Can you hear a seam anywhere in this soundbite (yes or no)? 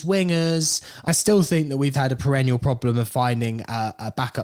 yes